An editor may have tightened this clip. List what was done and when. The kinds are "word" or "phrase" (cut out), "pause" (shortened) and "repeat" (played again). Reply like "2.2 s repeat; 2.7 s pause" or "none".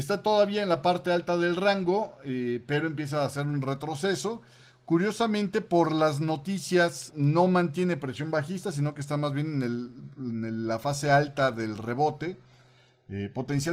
7.1 s phrase